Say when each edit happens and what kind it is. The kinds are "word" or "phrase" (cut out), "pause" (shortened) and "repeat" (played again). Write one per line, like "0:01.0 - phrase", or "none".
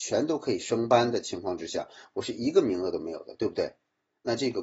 none